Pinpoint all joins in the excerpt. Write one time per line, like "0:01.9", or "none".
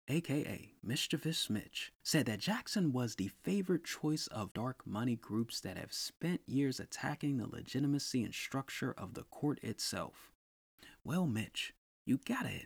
0:02.0
0:04.5